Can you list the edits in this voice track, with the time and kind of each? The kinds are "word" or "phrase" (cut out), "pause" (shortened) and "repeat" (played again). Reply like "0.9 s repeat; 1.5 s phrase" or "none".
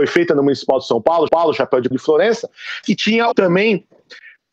1.3 s repeat; 1.9 s word; 2.8 s word; 3.3 s word